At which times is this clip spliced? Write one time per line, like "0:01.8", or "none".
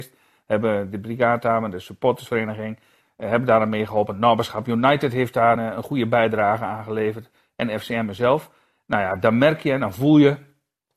0:05.6